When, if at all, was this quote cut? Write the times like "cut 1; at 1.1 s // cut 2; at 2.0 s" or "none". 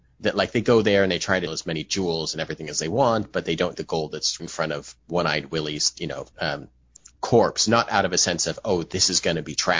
cut 1; at 1.5 s // cut 2; at 3.7 s // cut 3; at 4.4 s // cut 4; at 5.0 s // cut 5; at 6.3 s